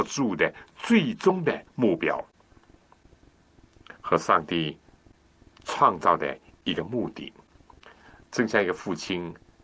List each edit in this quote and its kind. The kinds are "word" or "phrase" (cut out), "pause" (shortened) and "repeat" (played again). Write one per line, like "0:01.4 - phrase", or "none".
0:04.0 - pause